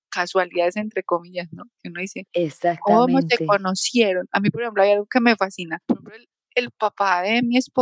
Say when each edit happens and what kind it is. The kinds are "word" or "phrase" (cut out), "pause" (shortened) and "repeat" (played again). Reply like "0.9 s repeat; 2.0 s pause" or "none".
5.8 s pause